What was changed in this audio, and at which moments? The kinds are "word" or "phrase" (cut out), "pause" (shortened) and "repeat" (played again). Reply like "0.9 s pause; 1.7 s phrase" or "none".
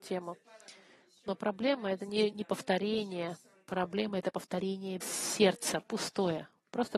2.3 s word; 5.0 s word